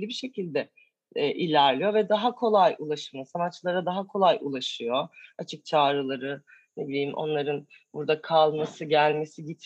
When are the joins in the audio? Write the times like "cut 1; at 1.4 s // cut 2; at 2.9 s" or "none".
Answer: none